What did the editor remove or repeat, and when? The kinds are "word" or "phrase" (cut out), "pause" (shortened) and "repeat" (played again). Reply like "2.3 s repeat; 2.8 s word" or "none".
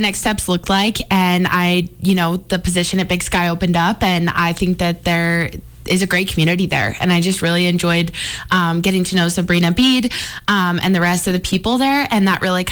none